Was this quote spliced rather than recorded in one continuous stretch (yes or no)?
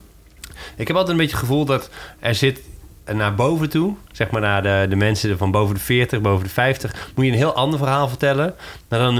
no